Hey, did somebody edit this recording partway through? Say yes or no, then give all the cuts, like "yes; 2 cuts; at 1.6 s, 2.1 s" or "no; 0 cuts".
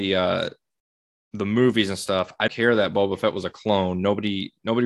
yes; 1 cut; at 2.5 s